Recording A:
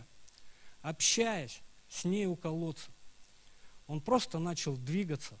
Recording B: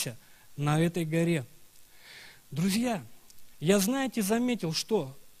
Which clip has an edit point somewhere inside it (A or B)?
B